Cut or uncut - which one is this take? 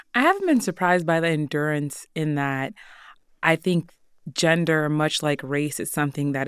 uncut